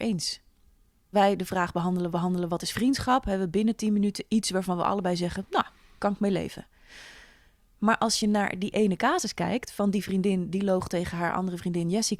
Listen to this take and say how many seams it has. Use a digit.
2